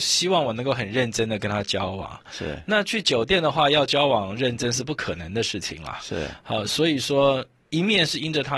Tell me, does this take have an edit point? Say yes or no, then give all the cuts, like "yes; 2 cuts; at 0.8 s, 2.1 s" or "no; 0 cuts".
no; 0 cuts